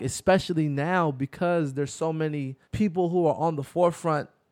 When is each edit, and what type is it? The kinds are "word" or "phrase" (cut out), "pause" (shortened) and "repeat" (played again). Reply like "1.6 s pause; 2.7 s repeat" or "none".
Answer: 2.6 s pause